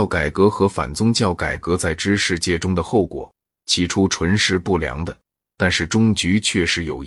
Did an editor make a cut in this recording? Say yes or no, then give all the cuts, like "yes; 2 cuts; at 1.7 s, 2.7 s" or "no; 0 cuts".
no; 0 cuts